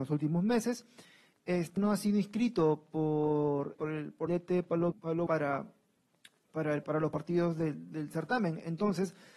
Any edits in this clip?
yes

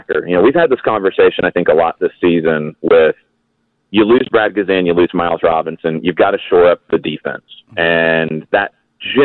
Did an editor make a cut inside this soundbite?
no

